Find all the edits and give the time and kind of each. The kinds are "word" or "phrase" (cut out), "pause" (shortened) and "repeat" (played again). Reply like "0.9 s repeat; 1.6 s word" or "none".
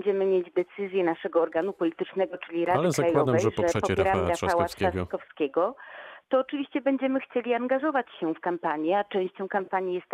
none